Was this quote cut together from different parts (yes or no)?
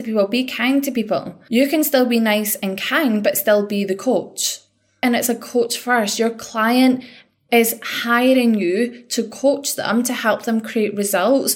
no